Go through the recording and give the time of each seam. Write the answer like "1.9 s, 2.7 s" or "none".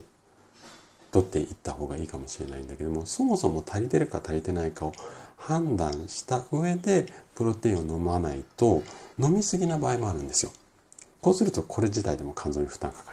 9.1 s